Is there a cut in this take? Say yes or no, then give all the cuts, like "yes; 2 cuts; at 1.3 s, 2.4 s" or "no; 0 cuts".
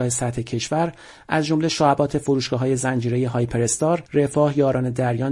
yes; 1 cut; at 4.1 s